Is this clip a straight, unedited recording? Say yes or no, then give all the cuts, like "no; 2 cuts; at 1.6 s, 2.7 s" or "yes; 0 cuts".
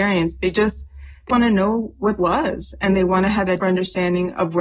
no; 3 cuts; at 1.3 s, 2.2 s, 3.6 s